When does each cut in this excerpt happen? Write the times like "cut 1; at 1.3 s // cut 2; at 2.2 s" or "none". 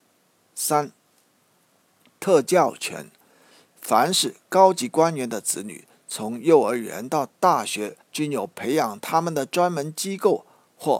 cut 1; at 8.0 s